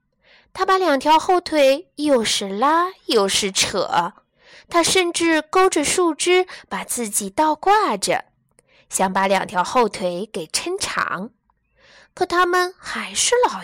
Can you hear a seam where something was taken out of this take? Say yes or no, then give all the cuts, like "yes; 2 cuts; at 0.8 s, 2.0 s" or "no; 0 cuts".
no; 0 cuts